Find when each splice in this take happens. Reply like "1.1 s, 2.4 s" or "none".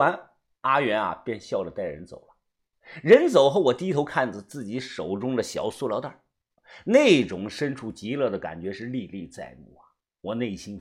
none